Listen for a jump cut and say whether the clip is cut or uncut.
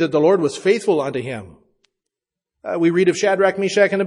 uncut